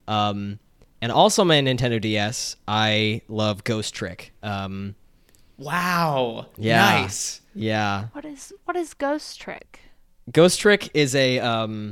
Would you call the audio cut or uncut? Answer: uncut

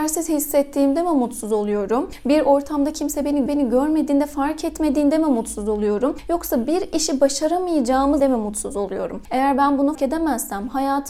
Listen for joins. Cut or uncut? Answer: cut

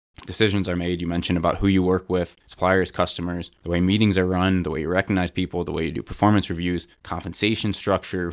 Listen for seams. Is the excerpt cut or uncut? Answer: cut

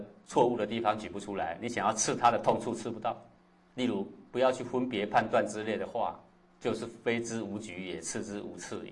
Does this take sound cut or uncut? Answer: uncut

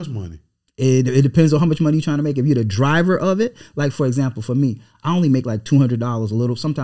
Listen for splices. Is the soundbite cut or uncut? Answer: uncut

